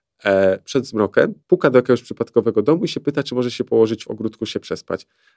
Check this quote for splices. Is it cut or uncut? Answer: cut